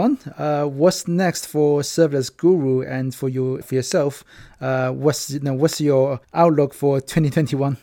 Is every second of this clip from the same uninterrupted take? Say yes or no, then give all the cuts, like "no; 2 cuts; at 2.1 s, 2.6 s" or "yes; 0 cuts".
no; 2 cuts; at 3.6 s, 6.2 s